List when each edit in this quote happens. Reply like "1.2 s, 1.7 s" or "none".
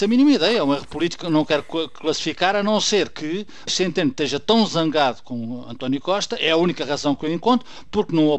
1.2 s, 3.7 s